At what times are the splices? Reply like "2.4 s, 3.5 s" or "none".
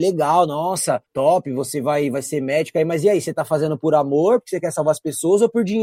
1.1 s